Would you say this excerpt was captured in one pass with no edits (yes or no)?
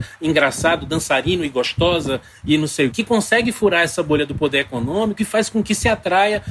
no